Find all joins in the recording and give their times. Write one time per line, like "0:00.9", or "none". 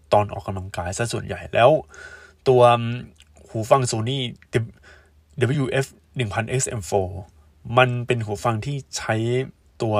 none